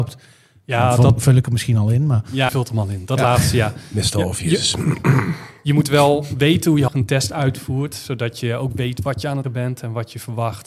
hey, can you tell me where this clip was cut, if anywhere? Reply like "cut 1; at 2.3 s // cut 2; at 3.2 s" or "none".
cut 1; at 2.5 s // cut 2; at 6.9 s // cut 3; at 9.4 s